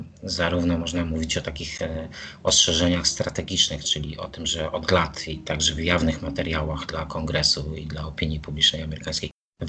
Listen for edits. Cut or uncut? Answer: uncut